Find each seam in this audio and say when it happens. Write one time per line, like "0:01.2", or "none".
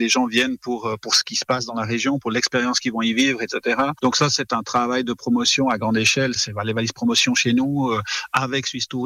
none